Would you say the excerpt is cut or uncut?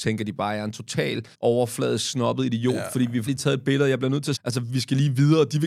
cut